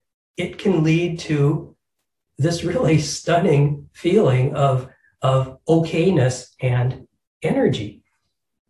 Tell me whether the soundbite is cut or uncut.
uncut